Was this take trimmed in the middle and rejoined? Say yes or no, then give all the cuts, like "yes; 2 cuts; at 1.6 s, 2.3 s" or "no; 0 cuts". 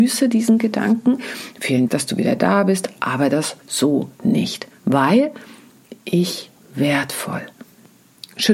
yes; 3 cuts; at 1.9 s, 3.6 s, 6.6 s